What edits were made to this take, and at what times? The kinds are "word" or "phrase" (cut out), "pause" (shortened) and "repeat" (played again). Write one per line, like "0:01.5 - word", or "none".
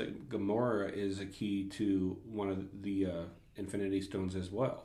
none